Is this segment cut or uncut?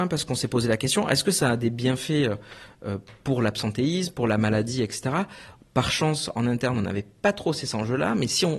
uncut